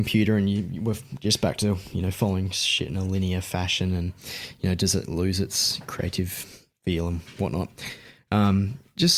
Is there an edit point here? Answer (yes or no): no